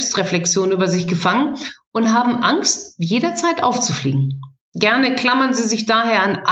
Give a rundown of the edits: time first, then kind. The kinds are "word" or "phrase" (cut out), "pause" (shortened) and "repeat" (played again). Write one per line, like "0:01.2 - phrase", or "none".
none